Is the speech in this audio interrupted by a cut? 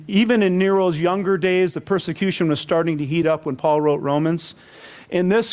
no; 0 cuts

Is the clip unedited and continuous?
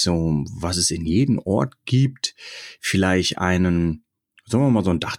yes; 0 cuts

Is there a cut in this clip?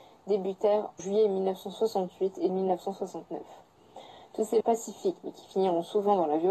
yes; 3 cuts; at 1.0 s, 2.5 s, 4.6 s

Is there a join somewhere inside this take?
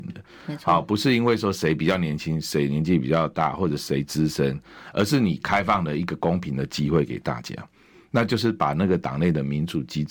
no; 0 cuts

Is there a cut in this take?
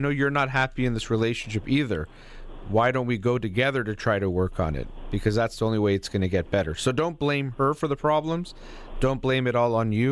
no; 0 cuts

